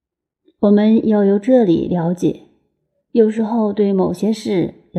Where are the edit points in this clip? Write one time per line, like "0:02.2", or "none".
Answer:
none